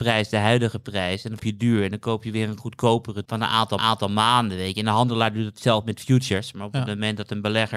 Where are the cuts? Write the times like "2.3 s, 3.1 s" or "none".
1.4 s, 3.3 s, 3.8 s